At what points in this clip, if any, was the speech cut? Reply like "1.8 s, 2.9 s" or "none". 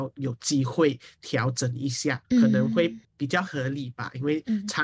2.2 s